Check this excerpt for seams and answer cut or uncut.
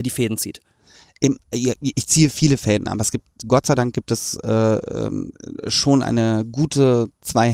uncut